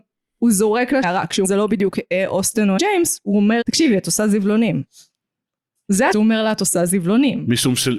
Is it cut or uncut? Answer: cut